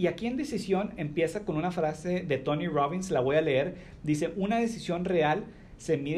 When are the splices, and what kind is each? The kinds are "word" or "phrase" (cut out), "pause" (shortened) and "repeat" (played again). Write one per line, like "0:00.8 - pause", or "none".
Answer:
none